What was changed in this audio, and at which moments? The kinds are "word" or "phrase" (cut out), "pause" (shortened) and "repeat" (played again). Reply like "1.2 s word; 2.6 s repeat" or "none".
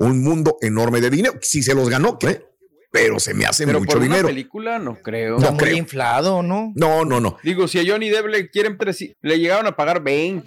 2.2 s word; 7.1 s word; 8.8 s word; 9.1 s word

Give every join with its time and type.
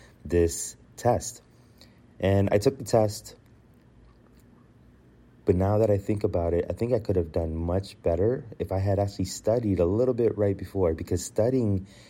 none

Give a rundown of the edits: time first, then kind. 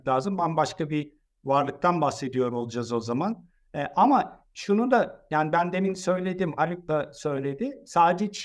none

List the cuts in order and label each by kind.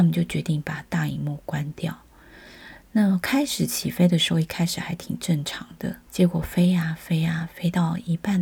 6.1 s pause

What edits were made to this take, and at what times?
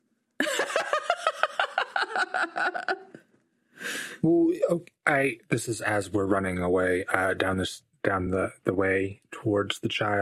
none

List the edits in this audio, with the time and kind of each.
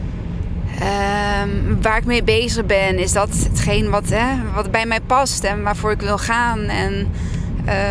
none

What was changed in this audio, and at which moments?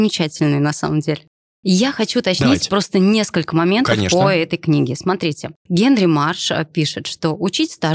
5.6 s pause

